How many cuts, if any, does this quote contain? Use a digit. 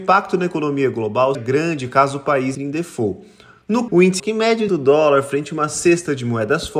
5